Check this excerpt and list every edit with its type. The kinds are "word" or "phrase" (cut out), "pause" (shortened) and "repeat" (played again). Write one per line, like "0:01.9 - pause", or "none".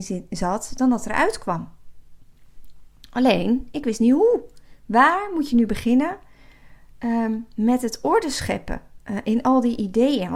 none